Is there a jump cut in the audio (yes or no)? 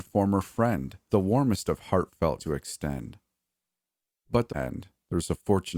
yes